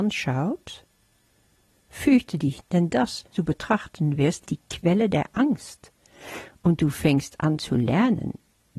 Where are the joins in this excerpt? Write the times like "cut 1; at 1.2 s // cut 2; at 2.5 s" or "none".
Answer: cut 1; at 2.6 s // cut 2; at 3.3 s // cut 3; at 4.5 s